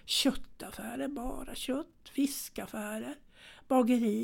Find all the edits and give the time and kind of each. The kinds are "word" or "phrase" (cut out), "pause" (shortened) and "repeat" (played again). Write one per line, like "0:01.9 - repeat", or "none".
none

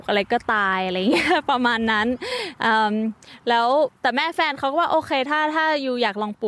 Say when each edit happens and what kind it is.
0:04.0 - pause

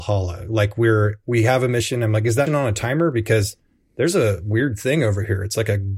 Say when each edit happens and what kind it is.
0:02.5 - word

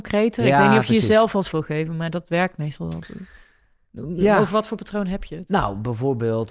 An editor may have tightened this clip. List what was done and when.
0:01.5 - word

